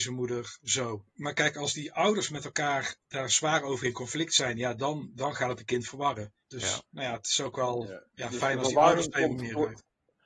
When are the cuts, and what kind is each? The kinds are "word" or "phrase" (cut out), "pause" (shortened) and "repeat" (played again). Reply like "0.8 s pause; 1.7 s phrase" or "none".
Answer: 6.4 s pause